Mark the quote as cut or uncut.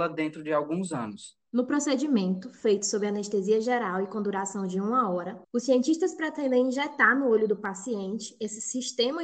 cut